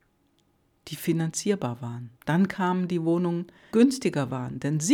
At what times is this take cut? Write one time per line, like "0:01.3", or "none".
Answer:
0:02.1
0:03.7